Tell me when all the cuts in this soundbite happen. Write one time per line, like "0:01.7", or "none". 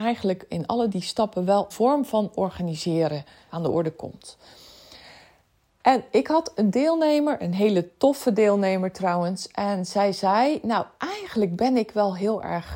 0:00.9
0:01.7
0:03.5